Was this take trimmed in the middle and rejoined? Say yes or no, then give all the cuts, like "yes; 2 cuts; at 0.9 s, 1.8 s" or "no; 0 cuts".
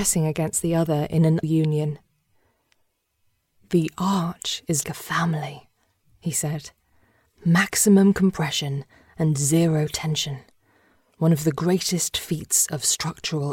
yes; 2 cuts; at 1.4 s, 4.8 s